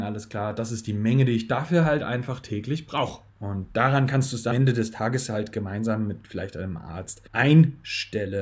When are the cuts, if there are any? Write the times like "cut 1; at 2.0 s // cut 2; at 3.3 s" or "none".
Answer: cut 1; at 3.3 s // cut 2; at 4.5 s // cut 3; at 7.3 s